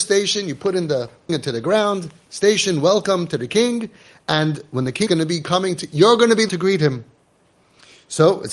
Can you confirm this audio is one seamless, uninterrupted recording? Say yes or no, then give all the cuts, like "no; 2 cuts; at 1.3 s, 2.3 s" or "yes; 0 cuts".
no; 3 cuts; at 1.3 s, 5.1 s, 6.5 s